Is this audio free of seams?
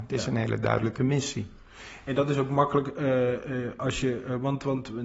yes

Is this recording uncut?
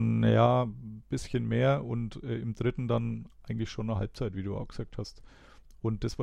yes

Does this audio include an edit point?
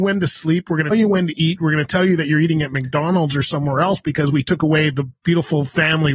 yes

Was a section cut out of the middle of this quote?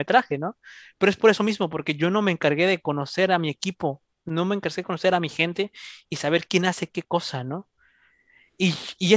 no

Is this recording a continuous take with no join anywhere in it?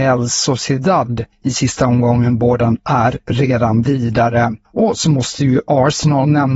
no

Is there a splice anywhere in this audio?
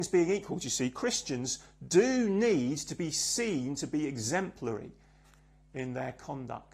no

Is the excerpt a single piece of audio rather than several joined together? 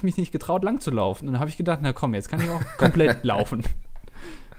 yes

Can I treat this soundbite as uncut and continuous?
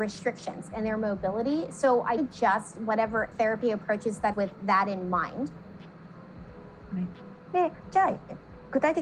no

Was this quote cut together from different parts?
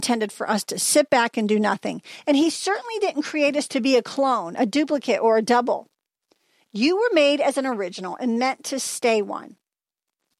no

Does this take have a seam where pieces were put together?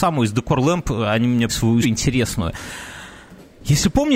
yes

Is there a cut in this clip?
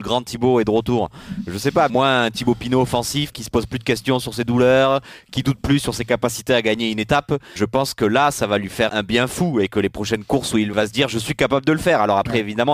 yes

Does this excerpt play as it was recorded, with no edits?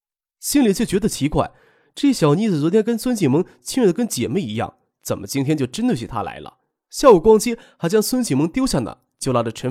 yes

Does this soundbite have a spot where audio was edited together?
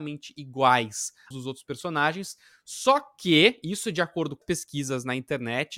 yes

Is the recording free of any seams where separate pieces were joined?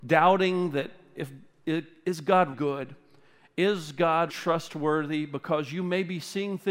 no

